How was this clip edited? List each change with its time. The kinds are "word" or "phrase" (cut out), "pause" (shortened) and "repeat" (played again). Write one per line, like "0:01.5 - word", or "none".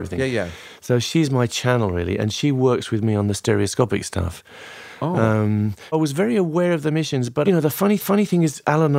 0:05.9 - word
0:07.4 - phrase
0:08.0 - repeat